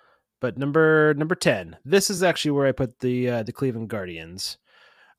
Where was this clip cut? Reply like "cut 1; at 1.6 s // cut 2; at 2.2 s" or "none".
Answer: none